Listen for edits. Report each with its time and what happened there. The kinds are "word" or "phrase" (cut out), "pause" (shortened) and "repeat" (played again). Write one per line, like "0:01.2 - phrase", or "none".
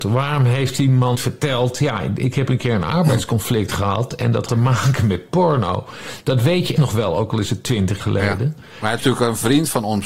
0:01.1 - word
0:04.5 - word
0:06.8 - word
0:08.0 - word
0:09.0 - word